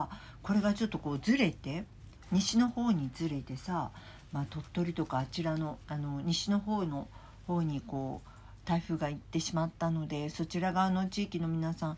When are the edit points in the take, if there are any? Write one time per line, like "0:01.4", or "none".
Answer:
0:05.8